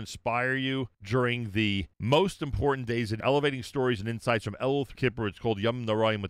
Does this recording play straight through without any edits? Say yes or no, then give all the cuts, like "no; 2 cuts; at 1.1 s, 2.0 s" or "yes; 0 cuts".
no; 4 cuts; at 0.9 s, 1.9 s, 3.2 s, 4.9 s